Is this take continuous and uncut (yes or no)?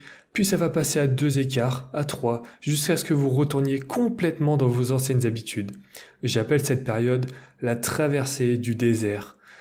yes